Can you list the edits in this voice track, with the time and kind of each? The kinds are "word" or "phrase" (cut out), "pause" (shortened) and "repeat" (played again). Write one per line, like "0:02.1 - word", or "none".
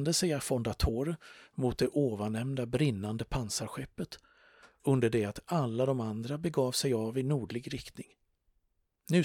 none